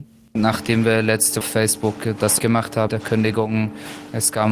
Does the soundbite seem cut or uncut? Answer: cut